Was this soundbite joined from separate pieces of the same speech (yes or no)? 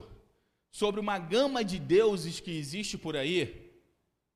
no